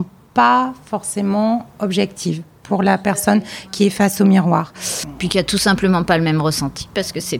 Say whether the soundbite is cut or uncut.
uncut